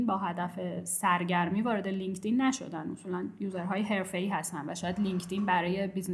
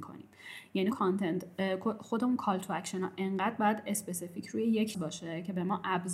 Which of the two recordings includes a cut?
second; 2 cuts; at 0.9 s, 4.9 s

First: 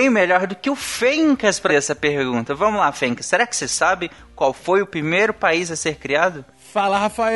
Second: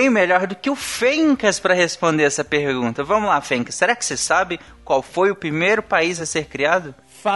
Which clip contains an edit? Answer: first; 1 cut; at 1.7 s

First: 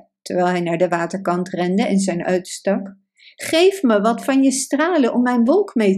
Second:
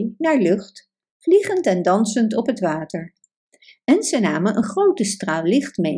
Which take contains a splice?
first; 1 cut; at 2.2 s

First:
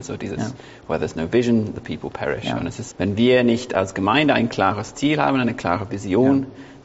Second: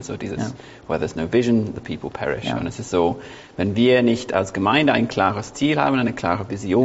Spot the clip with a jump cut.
first; 1 cut; at 2.9 s

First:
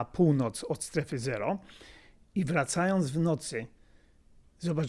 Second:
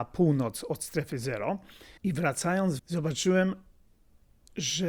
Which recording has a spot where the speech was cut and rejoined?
second; 2 cuts; at 2.0 s, 2.8 s

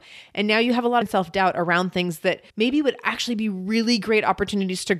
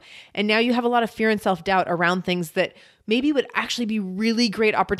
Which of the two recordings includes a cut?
first; 2 cuts; at 1.0 s, 2.5 s

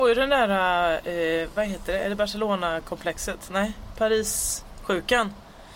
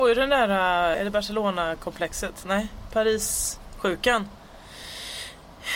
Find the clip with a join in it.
second; 1 cut; at 0.9 s

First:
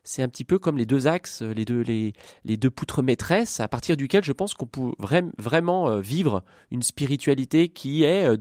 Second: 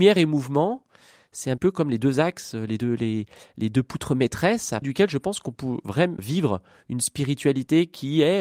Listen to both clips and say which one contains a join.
second; 3 cuts; at 1.6 s, 4.8 s, 6.2 s

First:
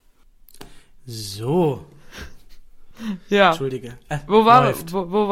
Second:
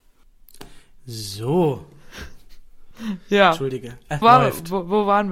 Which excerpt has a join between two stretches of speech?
second; 1 cut; at 4.2 s

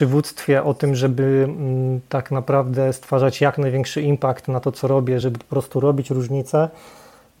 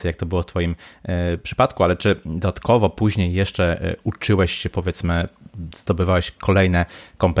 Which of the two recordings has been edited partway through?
first; 1 cut; at 5.2 s

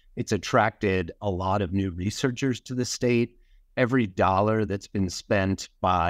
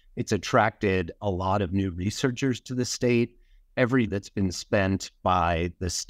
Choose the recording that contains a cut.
second; 1 cut; at 4.1 s

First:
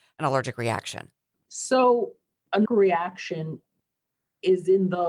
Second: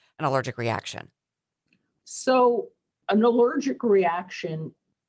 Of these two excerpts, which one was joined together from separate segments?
first; 2 cuts; at 1.3 s, 2.6 s

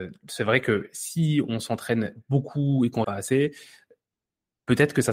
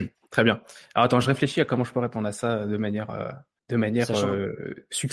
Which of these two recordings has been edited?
first; 1 cut; at 3.0 s

